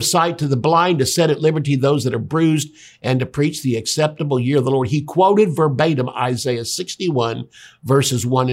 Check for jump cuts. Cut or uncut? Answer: uncut